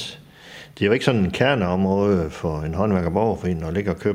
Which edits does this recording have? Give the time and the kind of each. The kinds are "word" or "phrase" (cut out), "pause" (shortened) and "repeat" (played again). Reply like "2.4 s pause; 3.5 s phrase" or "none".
none